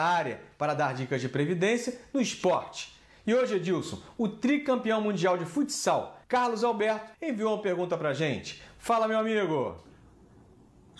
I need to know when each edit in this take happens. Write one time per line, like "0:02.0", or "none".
0:06.2
0:07.1

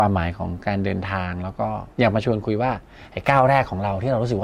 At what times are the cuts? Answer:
0:01.9

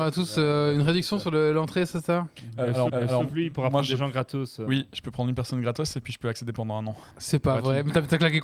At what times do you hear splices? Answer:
0:02.9
0:07.1

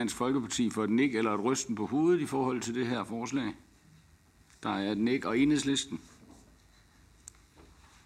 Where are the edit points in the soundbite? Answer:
none

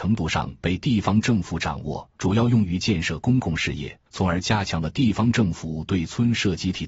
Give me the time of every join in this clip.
0:02.2
0:04.1

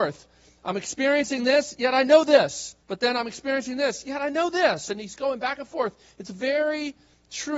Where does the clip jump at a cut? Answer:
0:02.8

